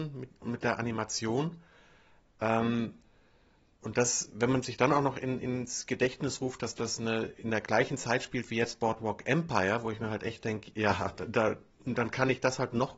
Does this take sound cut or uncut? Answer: uncut